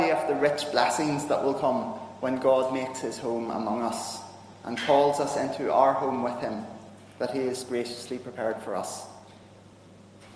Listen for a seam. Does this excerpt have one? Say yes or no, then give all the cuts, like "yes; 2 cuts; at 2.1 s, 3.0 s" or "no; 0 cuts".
no; 0 cuts